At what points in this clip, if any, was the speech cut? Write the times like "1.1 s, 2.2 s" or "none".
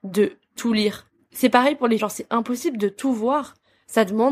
2.0 s